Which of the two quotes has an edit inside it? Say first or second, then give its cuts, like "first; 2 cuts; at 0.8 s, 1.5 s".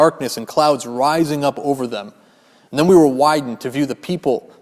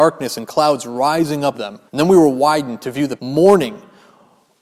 second; 3 cuts; at 1.5 s, 1.9 s, 3.2 s